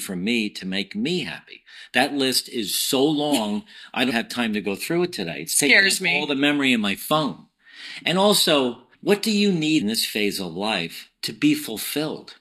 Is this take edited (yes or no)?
yes